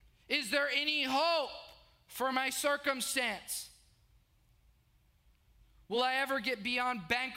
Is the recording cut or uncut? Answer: uncut